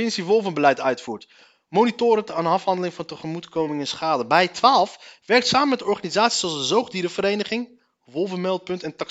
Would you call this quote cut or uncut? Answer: uncut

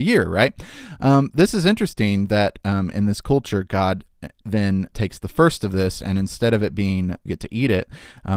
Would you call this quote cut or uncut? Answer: cut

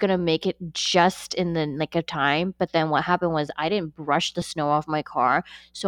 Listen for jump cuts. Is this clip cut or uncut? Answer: uncut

